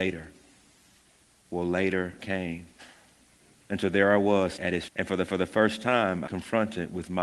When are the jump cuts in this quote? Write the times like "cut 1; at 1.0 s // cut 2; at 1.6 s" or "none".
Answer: cut 1; at 2.2 s // cut 2; at 4.6 s // cut 3; at 4.9 s // cut 4; at 5.3 s // cut 5; at 6.3 s